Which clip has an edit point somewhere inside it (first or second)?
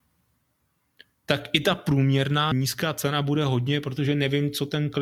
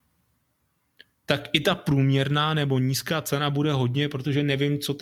first